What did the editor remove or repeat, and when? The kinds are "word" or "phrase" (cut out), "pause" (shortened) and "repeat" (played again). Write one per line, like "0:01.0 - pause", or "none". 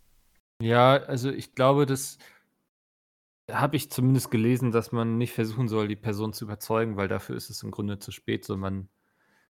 none